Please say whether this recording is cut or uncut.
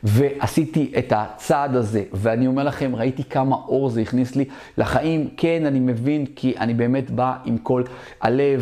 uncut